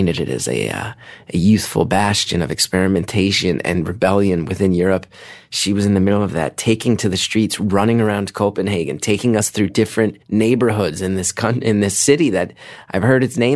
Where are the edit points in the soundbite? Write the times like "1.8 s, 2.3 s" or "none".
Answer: 10.2 s

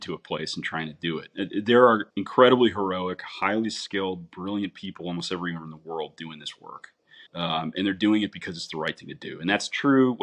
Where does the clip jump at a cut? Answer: 2.1 s, 7.3 s

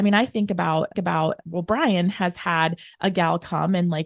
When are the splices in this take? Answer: 0.9 s

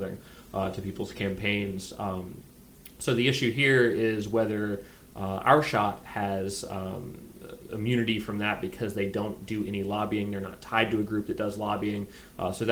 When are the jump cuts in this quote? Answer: none

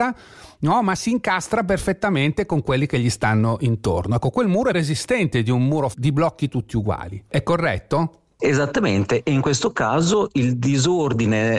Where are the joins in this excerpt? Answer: 4.7 s, 5.9 s

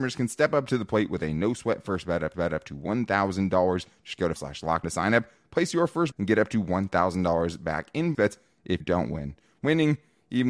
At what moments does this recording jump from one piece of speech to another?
2.3 s, 4.4 s, 4.8 s, 6.1 s, 8.1 s, 8.8 s

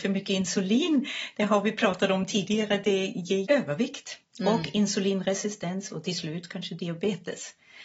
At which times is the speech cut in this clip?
3.4 s, 4.2 s

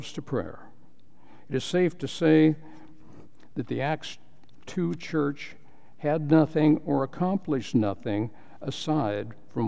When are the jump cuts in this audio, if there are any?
none

